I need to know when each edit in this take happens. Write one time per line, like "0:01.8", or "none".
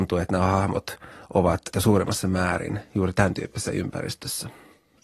0:01.7